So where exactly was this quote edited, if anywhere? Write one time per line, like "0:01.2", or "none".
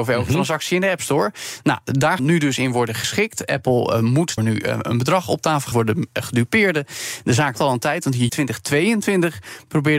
0:02.2
0:04.4
0:05.7
0:07.5
0:08.3